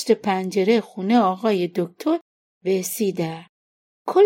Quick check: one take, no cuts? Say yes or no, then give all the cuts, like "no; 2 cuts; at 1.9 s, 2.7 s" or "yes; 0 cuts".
yes; 0 cuts